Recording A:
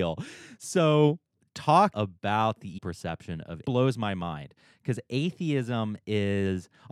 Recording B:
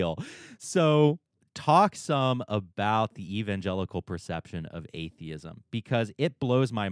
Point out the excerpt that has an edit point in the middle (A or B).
A